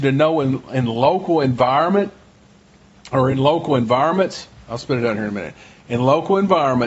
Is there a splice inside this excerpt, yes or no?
no